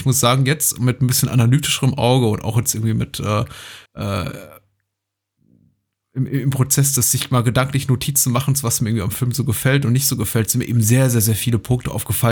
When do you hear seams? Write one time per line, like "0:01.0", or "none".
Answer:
0:03.9